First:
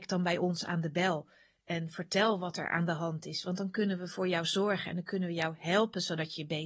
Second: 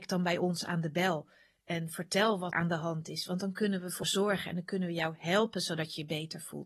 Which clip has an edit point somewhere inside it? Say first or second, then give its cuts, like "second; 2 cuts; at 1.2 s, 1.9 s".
second; 2 cuts; at 2.5 s, 4.0 s